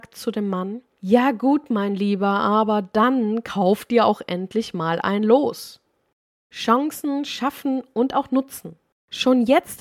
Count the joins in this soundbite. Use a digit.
0